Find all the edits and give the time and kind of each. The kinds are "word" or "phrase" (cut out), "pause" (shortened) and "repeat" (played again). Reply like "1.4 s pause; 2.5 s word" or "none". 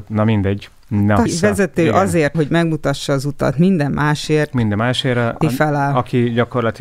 1.3 s word; 2.3 s word; 5.4 s word